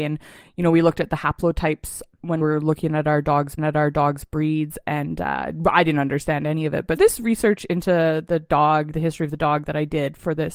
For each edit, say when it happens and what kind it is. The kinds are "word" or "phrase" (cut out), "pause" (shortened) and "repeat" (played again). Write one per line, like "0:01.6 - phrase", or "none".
0:02.4 - word
0:03.6 - repeat
0:07.0 - word